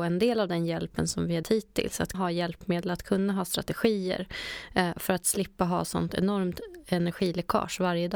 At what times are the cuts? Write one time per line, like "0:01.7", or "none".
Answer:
0:01.4
0:02.1